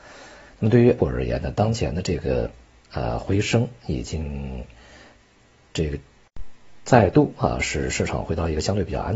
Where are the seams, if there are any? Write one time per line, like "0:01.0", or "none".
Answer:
0:01.0